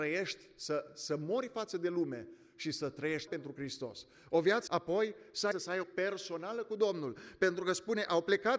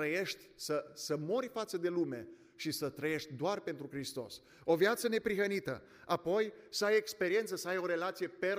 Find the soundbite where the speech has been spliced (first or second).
first